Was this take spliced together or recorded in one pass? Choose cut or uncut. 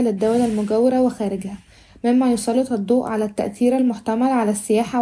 uncut